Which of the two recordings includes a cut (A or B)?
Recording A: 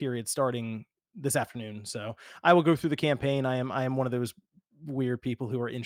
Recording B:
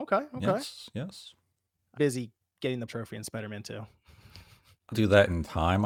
B